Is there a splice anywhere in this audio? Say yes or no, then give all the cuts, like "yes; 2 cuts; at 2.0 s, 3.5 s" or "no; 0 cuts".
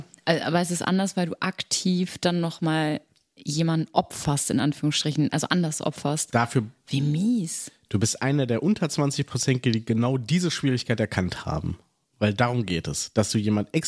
no; 0 cuts